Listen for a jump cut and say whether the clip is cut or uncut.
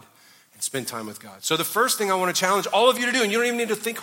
uncut